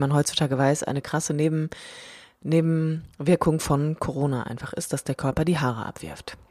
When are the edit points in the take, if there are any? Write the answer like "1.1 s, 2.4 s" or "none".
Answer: none